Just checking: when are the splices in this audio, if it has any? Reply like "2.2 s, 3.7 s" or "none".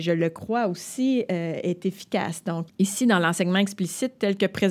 2.7 s